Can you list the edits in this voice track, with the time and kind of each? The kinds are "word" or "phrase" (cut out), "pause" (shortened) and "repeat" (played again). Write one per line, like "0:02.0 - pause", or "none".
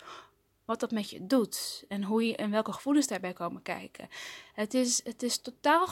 none